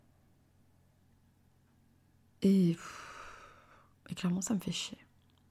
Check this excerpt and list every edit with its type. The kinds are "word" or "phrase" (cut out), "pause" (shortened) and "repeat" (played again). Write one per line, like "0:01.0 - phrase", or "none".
none